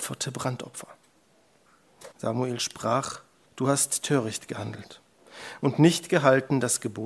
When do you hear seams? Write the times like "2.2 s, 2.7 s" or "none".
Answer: 2.1 s, 3.4 s